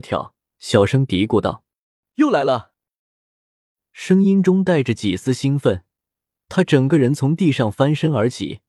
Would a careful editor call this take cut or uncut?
uncut